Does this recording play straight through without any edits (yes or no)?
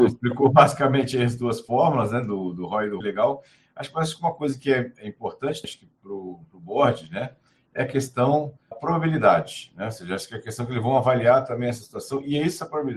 no